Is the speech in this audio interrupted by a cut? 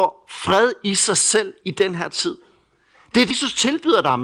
yes; 1 cut; at 3.3 s

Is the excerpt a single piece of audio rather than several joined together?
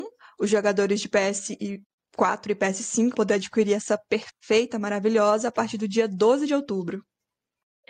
no; 1 cut; at 3.1 s

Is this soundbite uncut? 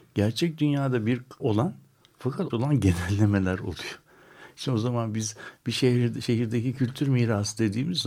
no; 2 cuts; at 1.4 s, 2.5 s

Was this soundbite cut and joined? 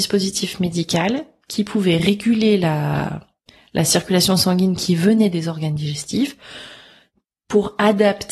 no; 0 cuts

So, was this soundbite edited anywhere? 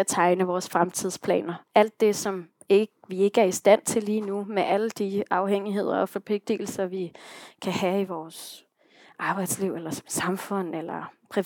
no; 0 cuts

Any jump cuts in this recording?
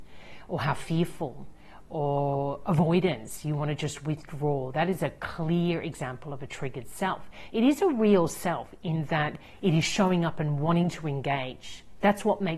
no; 0 cuts

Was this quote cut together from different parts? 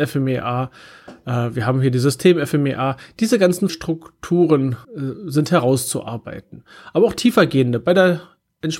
yes; 2 cuts; at 3.7 s, 4.8 s

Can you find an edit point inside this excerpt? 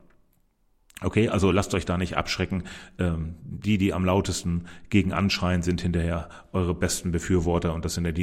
no; 0 cuts

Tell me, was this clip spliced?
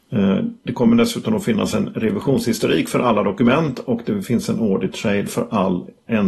no; 0 cuts

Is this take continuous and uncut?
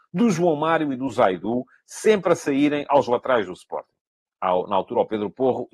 yes; 0 cuts

